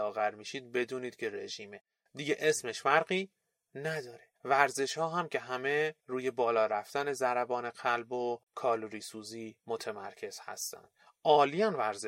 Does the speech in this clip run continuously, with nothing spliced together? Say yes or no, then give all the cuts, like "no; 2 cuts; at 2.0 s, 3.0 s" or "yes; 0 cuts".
no; 4 cuts; at 4.4 s, 6.0 s, 8.5 s, 9.6 s